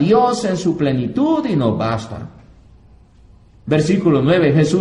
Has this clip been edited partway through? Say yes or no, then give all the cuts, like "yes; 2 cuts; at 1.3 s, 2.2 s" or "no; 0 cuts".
no; 0 cuts